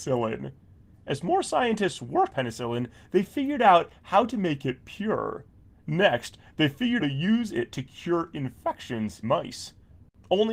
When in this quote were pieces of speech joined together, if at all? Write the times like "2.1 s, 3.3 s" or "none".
2.3 s, 7.0 s, 9.2 s